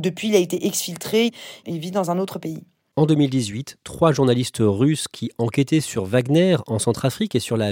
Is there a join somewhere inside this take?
no; 0 cuts

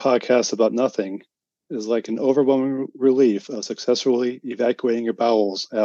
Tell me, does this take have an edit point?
no; 0 cuts

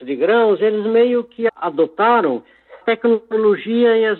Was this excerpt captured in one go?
no; 1 cut; at 2.8 s

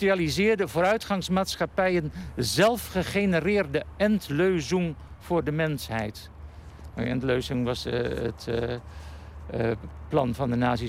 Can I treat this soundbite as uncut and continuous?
yes; 0 cuts

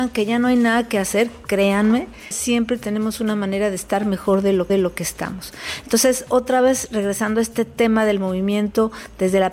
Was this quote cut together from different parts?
yes; 2 cuts; at 2.3 s, 4.7 s

